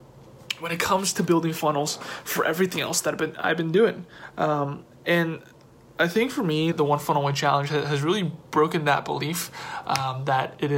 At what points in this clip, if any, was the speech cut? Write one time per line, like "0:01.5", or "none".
0:06.7